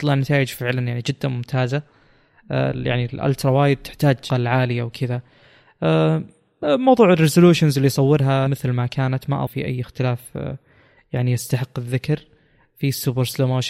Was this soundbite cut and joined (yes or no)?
yes